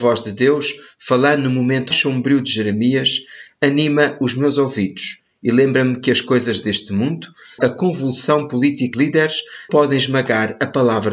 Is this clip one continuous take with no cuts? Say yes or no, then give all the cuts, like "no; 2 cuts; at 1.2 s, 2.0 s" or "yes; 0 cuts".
no; 4 cuts; at 1.9 s, 7.6 s, 8.9 s, 9.7 s